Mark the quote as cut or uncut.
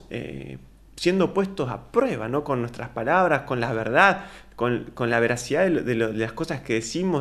uncut